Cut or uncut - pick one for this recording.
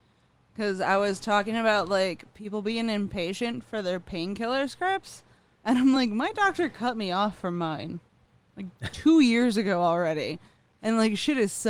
uncut